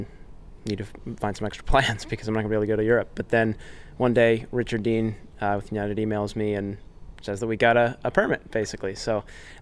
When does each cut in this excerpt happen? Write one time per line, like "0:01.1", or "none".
none